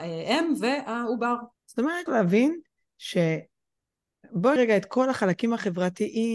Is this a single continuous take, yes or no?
no